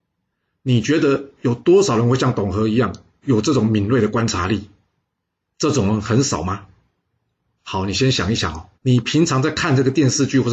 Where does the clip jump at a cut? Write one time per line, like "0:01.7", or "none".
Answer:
0:08.7